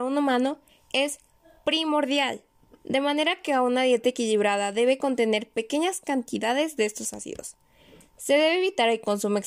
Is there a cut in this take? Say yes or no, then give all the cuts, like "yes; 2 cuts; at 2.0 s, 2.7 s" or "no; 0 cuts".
no; 0 cuts